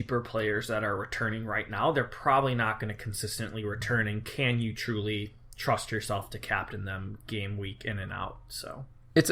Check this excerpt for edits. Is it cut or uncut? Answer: uncut